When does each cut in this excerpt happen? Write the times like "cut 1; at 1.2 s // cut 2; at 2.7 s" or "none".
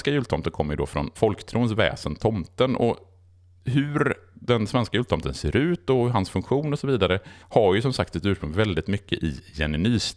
cut 1; at 1.2 s // cut 2; at 7.4 s